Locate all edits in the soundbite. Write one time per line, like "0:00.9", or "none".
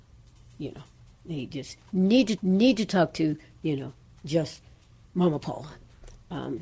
0:02.4